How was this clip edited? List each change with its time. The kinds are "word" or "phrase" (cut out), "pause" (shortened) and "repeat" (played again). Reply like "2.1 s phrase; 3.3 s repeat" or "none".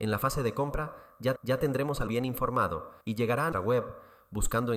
1.4 s repeat; 2.1 s word; 3.0 s pause; 3.5 s word